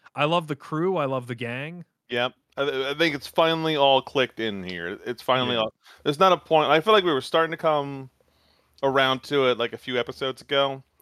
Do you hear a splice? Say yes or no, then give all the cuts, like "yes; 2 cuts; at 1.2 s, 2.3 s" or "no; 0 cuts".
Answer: no; 0 cuts